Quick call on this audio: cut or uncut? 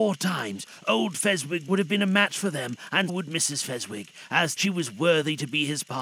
cut